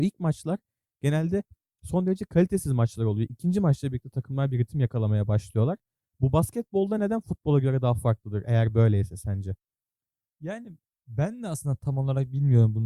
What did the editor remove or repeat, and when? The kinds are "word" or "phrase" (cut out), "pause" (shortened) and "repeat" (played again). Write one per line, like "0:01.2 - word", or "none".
none